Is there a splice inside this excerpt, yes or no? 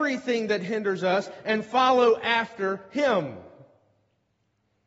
no